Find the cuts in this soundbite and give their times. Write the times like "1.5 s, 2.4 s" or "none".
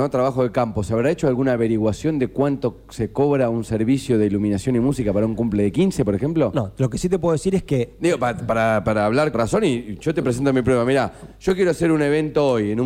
9.3 s